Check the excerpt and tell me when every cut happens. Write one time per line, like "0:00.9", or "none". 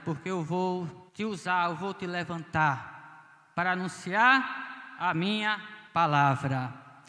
0:01.1
0:05.9